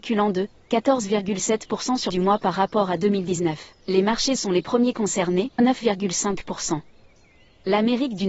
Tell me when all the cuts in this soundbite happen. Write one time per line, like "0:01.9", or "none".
0:02.1
0:03.8
0:04.4
0:05.6